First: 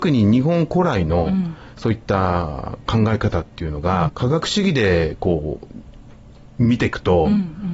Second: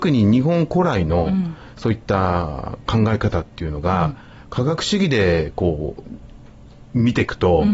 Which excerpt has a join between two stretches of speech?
first; 1 cut; at 4.1 s

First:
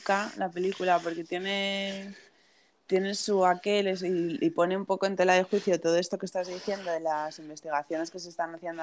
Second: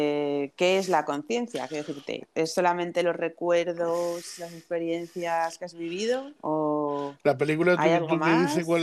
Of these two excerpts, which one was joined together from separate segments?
second; 1 cut; at 6.4 s

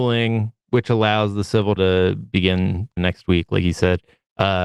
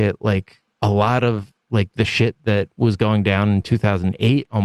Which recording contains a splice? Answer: first; 2 cuts; at 1.8 s, 3.0 s

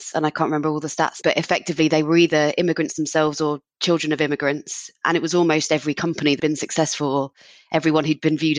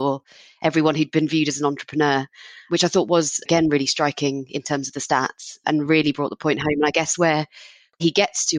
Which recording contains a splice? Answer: first; 2 cuts; at 1.2 s, 6.4 s

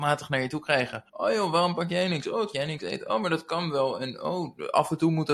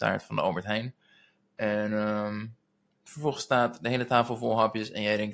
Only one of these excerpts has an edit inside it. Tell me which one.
first; 2 cuts; at 1.1 s, 2.5 s

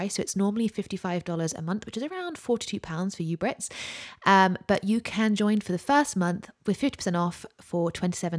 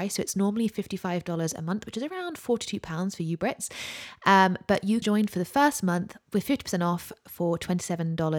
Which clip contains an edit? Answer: second; 1 cut; at 5.0 s

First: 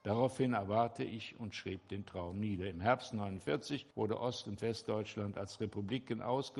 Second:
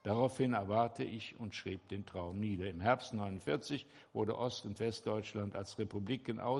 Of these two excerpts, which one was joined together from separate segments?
first; 1 cut; at 3.9 s

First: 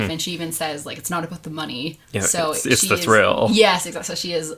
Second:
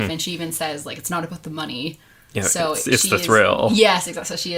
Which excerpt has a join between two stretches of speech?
first; 1 cut; at 2.0 s

